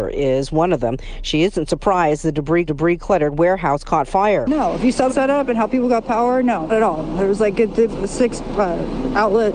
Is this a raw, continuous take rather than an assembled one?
no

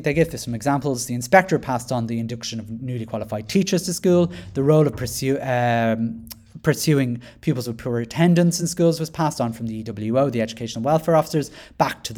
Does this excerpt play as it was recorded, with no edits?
yes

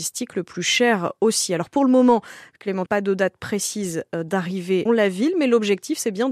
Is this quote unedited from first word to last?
no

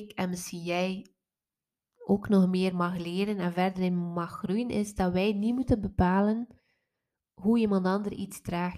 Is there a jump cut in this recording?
no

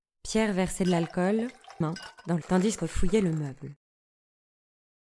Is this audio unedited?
no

